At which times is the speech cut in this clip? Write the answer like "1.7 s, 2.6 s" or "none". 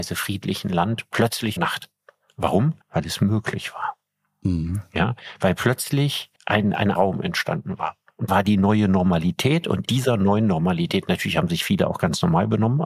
1.6 s, 2.8 s, 6.4 s, 7.0 s, 8.3 s, 9.9 s